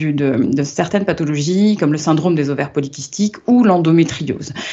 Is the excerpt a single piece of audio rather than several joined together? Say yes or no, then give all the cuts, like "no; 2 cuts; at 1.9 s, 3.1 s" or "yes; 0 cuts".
yes; 0 cuts